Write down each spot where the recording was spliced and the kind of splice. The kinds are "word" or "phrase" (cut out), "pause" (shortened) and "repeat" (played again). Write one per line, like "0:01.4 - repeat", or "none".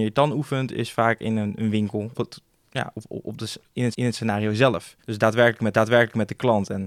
0:02.1 - phrase
0:03.9 - repeat
0:05.0 - pause
0:05.7 - repeat